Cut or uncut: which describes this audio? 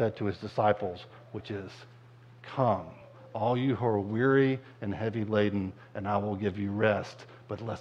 uncut